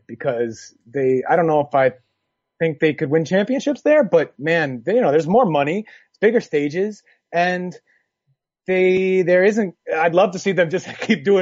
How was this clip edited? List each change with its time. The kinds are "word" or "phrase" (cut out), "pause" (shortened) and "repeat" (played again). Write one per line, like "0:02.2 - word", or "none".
none